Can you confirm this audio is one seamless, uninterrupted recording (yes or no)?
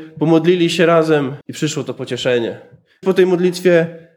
no